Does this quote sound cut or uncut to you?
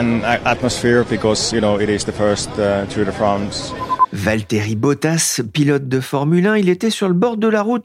uncut